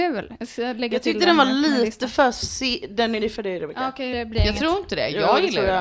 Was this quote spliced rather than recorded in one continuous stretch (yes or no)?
yes